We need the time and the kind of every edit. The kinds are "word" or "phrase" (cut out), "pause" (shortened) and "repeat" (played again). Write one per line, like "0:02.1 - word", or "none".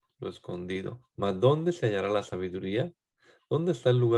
0:01.1 - pause

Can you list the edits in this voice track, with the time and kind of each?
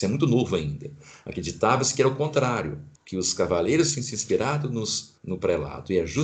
0:02.9 - pause
0:05.2 - pause

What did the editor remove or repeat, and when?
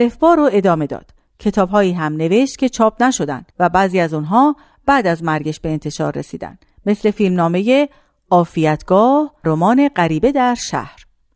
0:03.5 - pause
0:09.4 - word

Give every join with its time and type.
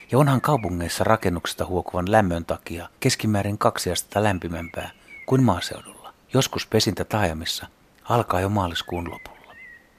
0:02.9 - pause
0:06.2 - pause

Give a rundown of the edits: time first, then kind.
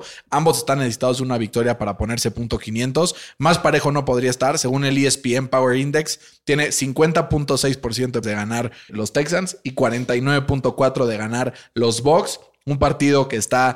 0:08.2 - word
0:08.9 - word

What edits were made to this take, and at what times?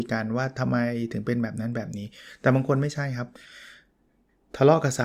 none

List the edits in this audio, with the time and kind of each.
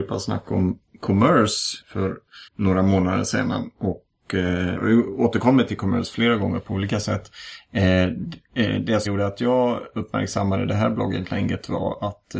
0:01.8 - word
0:02.5 - pause
0:04.8 - phrase
0:09.1 - word

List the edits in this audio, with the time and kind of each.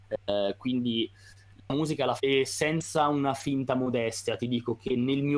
0:02.2 - word

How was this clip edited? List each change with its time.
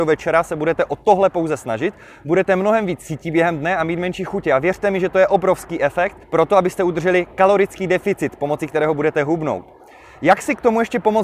0:06.2 - pause

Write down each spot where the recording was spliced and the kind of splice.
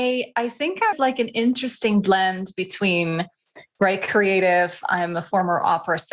0:00.9 - phrase

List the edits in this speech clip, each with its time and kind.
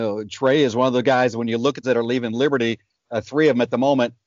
0:01.8 - phrase

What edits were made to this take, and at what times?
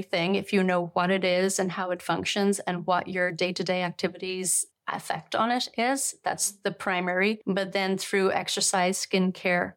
none

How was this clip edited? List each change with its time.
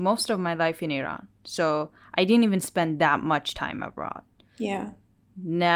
none

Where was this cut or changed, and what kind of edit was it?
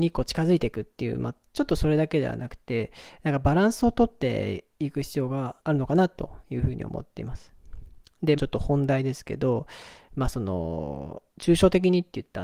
0:05.6 - pause
0:08.4 - phrase
0:11.3 - pause

